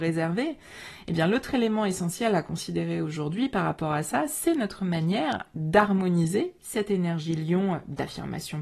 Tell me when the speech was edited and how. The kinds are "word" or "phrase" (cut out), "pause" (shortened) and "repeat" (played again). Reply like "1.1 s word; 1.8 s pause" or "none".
none